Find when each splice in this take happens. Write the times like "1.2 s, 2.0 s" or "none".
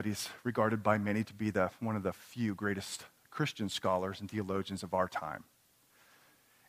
none

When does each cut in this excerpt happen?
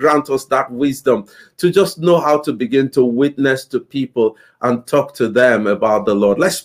none

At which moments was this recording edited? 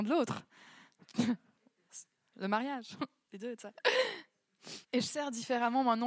4.8 s

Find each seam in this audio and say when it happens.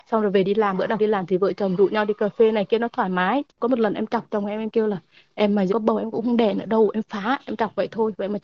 1.0 s, 5.7 s

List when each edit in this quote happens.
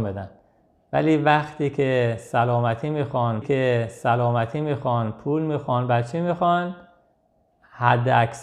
3.4 s

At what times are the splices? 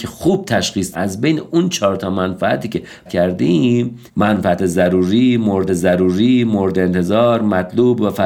0.9 s, 3.1 s, 4.1 s, 5.7 s

